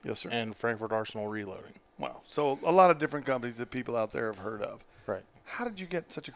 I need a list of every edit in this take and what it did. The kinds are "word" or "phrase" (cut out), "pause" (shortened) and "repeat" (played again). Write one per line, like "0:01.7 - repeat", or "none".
none